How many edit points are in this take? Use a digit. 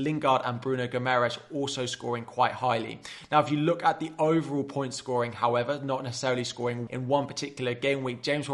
1